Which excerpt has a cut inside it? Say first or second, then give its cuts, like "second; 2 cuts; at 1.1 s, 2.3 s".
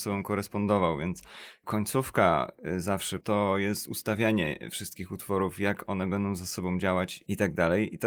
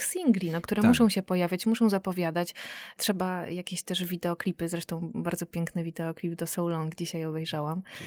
first; 1 cut; at 3.2 s